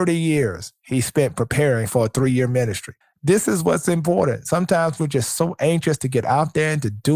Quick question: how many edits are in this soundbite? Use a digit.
1